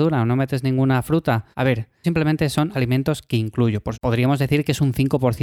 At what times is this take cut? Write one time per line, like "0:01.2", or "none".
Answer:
0:01.5
0:02.0
0:02.7
0:03.9